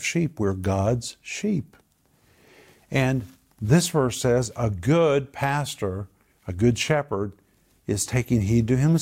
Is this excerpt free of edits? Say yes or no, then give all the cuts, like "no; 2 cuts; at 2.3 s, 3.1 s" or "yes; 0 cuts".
yes; 0 cuts